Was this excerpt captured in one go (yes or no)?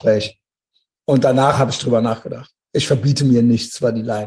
yes